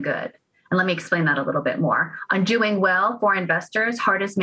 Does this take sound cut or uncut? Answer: uncut